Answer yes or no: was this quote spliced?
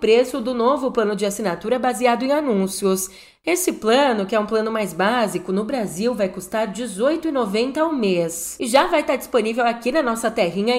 no